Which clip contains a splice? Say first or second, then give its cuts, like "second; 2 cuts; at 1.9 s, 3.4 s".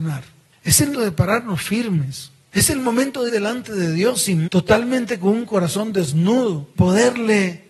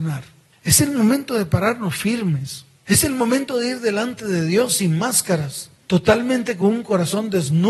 first; 4 cuts; at 0.9 s, 3.3 s, 4.5 s, 6.7 s